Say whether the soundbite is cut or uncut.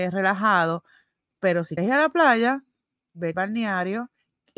cut